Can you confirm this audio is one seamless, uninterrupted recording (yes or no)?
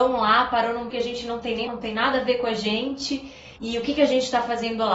no